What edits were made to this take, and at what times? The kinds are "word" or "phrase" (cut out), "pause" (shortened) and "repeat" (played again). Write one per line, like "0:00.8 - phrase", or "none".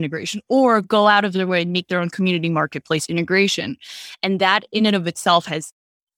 none